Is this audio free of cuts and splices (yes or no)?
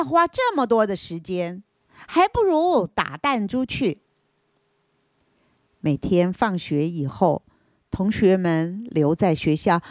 yes